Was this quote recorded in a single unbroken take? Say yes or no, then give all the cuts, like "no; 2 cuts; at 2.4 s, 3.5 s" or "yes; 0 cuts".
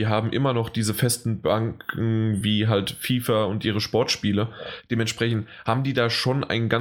yes; 0 cuts